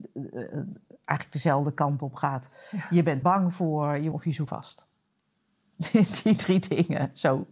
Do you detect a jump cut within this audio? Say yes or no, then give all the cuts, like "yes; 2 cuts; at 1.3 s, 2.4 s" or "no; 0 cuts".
yes; 3 cuts; at 3.2 s, 4.1 s, 4.5 s